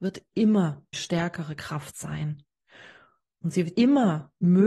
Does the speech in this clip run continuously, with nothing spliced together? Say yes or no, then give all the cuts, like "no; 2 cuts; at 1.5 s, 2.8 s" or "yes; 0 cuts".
no; 2 cuts; at 0.9 s, 3.8 s